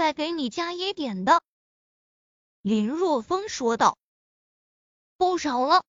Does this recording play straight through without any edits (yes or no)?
yes